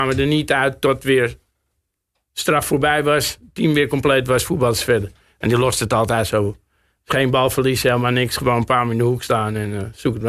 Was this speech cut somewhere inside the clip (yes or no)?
no